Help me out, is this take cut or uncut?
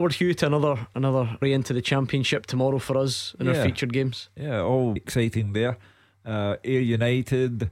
cut